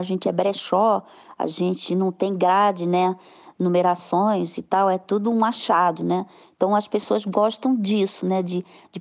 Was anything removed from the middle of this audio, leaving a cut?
no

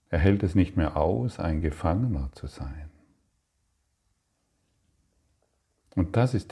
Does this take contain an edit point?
no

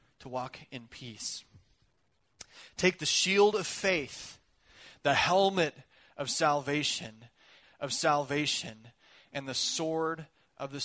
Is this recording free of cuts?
no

